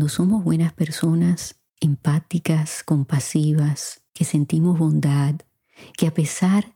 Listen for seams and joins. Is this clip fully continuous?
no; 2 cuts; at 1.7 s, 4.1 s

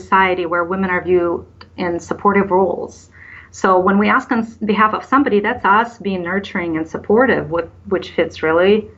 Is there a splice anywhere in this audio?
no; 0 cuts

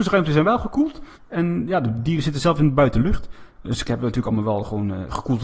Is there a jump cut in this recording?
yes; 1 cut; at 1.1 s

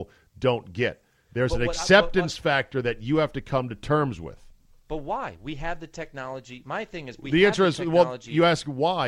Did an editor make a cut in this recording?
no; 0 cuts

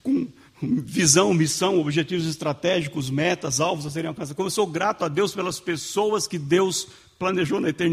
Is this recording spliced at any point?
no; 0 cuts

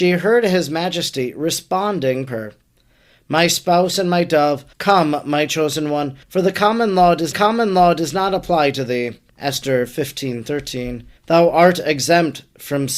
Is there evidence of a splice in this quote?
yes; 6 cuts; at 2.3 s, 4.7 s, 6.2 s, 7.3 s, 9.3 s, 11.2 s

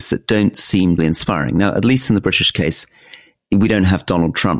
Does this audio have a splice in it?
yes; 1 cut; at 1.0 s

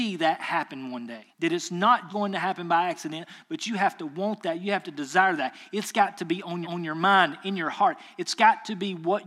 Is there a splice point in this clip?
yes; 3 cuts; at 1.3 s, 2.1 s, 6.6 s

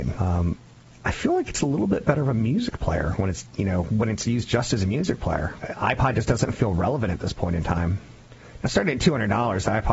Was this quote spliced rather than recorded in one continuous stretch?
no; 0 cuts

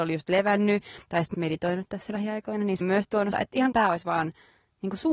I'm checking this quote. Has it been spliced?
yes; 5 cuts; at 1.0 s, 1.3 s, 2.8 s, 3.3 s, 3.7 s

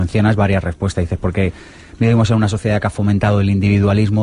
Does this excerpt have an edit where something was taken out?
no; 0 cuts

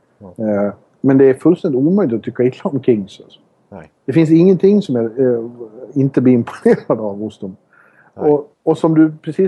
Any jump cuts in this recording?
yes; 2 cuts; at 4.0 s, 8.5 s

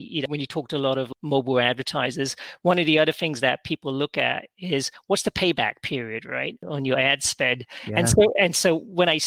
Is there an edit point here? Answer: no; 0 cuts

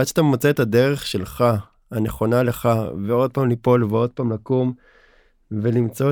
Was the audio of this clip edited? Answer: no; 0 cuts

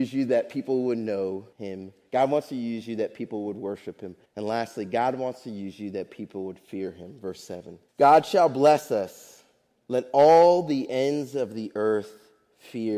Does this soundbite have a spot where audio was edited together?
yes; 3 cuts; at 1.5 s, 4.3 s, 7.9 s

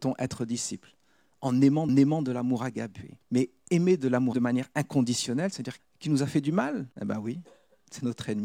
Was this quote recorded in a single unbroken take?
no; 5 cuts; at 1.9 s, 3.2 s, 4.3 s, 5.8 s, 6.9 s

